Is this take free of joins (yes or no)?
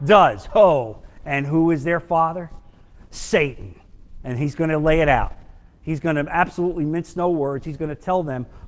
yes